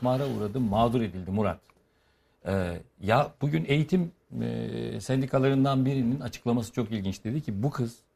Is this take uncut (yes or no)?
yes